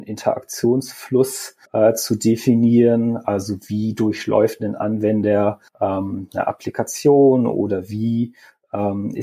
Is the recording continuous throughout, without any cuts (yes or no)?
no